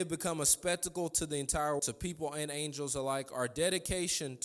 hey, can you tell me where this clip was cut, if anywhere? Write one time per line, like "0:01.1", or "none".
0:01.8